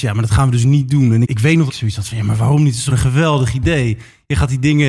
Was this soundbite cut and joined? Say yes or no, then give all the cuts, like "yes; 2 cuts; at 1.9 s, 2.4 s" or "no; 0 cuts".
yes; 3 cuts; at 1.2 s, 1.7 s, 2.9 s